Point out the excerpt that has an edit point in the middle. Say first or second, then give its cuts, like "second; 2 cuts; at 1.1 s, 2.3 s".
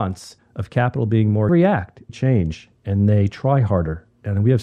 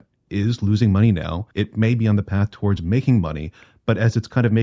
first; 2 cuts; at 1.5 s, 2.1 s